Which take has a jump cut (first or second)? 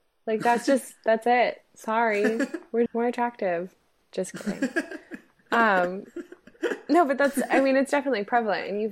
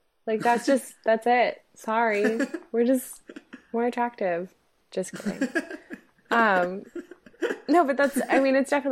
first